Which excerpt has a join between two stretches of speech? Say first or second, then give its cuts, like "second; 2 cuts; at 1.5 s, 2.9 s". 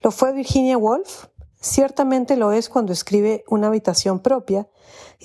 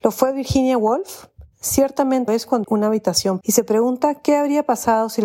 second; 3 cuts; at 2.3 s, 2.6 s, 3.4 s